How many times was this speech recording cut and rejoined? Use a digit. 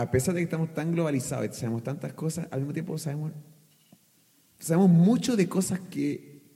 0